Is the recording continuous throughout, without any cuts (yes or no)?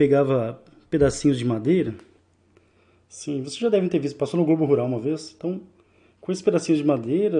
yes